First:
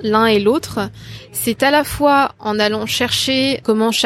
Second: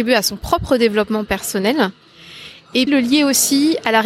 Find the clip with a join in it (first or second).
second